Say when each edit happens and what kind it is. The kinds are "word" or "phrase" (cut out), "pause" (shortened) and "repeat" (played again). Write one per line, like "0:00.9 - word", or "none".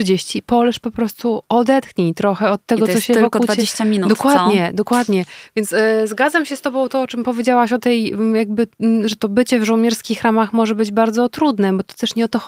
0:09.2 - word